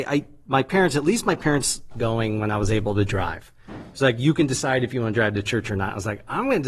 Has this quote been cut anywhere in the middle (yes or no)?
yes